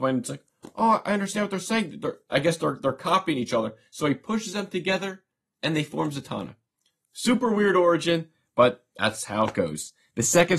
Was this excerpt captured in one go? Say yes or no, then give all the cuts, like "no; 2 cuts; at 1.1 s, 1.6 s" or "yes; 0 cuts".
yes; 0 cuts